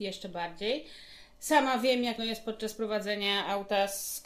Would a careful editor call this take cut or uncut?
cut